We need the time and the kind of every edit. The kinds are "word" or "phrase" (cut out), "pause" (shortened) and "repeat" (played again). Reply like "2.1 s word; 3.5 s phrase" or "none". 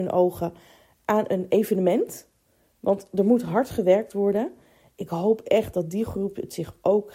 none